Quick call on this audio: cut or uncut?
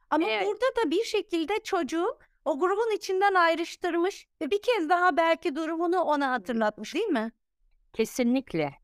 cut